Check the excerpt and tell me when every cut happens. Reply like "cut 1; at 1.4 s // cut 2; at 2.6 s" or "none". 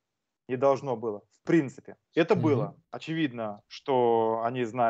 cut 1; at 2.0 s // cut 2; at 2.8 s